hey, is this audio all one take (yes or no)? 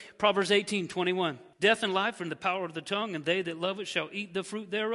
no